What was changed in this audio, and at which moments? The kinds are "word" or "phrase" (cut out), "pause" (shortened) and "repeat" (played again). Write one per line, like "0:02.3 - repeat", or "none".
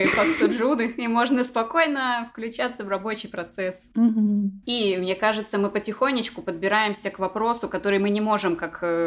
0:04.6 - pause